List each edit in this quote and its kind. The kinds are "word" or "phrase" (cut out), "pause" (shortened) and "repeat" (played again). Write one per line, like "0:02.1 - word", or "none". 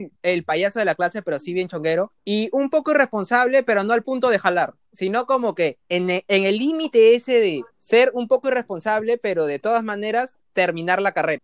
0:02.2 - pause
0:05.8 - pause
0:07.7 - pause